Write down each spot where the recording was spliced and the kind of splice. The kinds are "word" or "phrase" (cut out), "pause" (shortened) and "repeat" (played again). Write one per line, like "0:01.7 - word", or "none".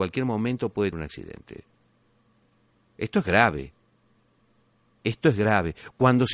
0:00.9 - word